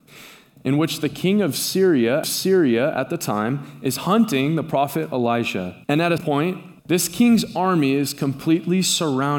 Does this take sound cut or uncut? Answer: cut